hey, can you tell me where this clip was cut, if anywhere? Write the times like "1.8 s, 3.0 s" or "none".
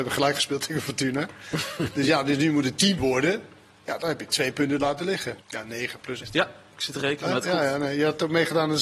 3.0 s, 5.4 s, 6.2 s

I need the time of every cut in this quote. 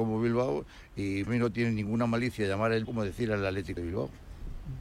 1.3 s, 2.8 s, 3.8 s

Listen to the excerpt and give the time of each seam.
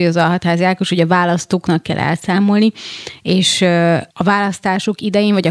4.1 s

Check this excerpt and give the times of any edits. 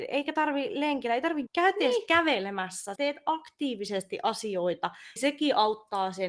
1.5 s, 3.0 s, 5.2 s

